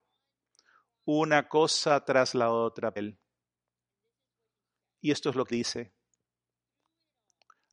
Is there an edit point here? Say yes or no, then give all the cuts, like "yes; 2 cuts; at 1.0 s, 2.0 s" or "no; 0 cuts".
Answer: yes; 2 cuts; at 3.0 s, 5.5 s